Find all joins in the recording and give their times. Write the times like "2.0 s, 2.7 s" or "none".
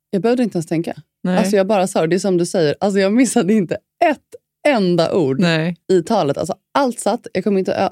5.8 s